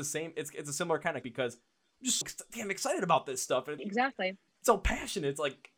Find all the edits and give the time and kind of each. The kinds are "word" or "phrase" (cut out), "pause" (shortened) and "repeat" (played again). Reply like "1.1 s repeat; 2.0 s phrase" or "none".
1.2 s word; 2.2 s word; 3.8 s word